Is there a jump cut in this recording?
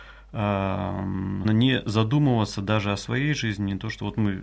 yes; 1 cut; at 1.4 s

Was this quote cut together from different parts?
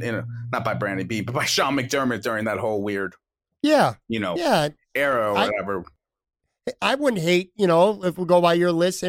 no; 0 cuts

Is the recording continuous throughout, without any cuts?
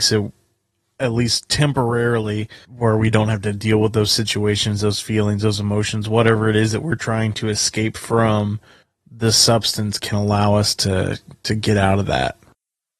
no; 3 cuts; at 2.6 s, 8.8 s, 10.0 s

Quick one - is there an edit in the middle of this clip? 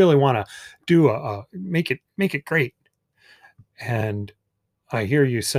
no; 0 cuts

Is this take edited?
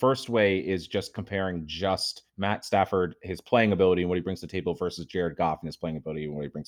yes; 1 cut; at 2.3 s

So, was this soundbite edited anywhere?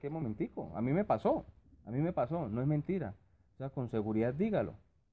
yes; 1 cut; at 1.6 s

